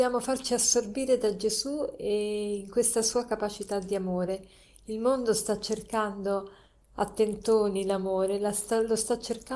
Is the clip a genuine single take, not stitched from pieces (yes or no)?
yes